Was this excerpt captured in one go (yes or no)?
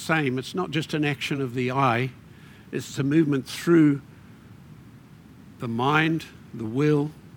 yes